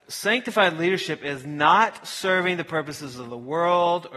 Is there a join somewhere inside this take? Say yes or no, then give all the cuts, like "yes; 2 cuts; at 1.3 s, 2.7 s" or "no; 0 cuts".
no; 0 cuts